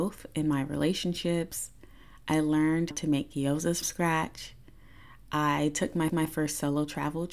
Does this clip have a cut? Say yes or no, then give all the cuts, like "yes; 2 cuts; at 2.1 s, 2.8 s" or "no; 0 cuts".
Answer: yes; 3 cuts; at 2.9 s, 3.8 s, 6.1 s